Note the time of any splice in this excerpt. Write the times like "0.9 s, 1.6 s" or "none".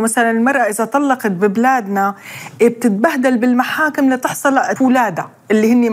4.8 s